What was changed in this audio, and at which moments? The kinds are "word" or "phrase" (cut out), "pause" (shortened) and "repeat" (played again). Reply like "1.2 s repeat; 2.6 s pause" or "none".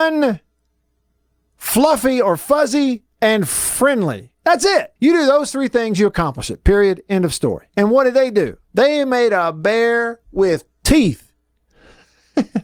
3.1 s pause; 4.4 s pause; 5.0 s pause; 7.7 s pause; 8.6 s pause